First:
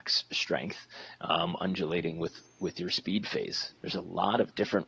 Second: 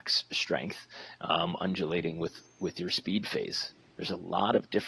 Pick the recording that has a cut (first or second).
first